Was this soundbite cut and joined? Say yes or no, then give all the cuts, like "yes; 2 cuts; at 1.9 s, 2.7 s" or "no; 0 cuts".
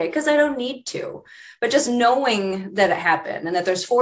no; 0 cuts